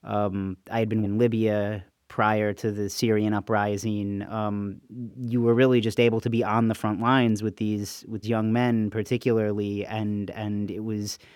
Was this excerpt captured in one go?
no; 2 cuts; at 1.0 s, 8.2 s

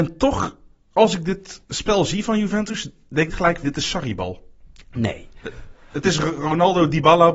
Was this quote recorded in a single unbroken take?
no; 3 cuts; at 1.6 s, 3.3 s, 3.6 s

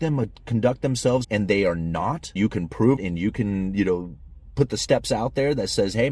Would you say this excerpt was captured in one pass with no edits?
no; 3 cuts; at 1.2 s, 2.4 s, 3.0 s

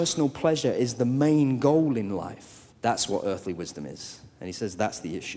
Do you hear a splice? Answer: yes; 1 cut; at 2.7 s

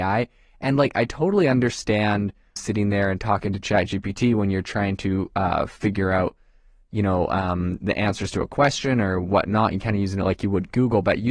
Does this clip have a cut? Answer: yes; 1 cut; at 2.6 s

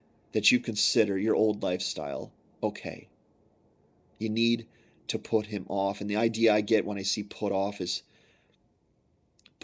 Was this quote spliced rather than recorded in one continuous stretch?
no; 0 cuts

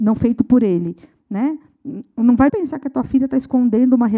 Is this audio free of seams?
no; 1 cut; at 2.5 s

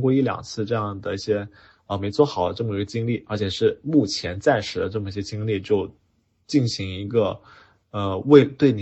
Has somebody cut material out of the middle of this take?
no; 0 cuts

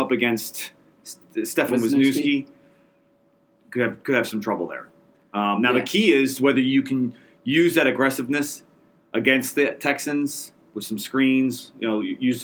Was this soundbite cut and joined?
no; 0 cuts

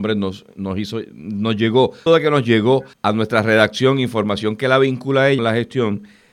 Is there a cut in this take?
yes; 3 cuts; at 2.1 s, 2.9 s, 5.4 s

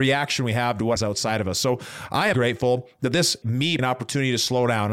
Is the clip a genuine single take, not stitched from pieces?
no; 4 cuts; at 1.0 s, 2.3 s, 3.4 s, 3.8 s

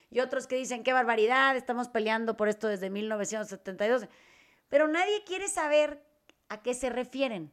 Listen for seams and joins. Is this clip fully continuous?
yes; 0 cuts

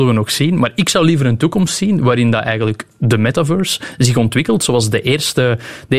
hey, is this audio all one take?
yes; 0 cuts

